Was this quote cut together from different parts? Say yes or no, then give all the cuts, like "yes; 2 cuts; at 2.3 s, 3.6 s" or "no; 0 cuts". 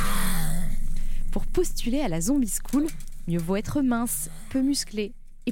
no; 0 cuts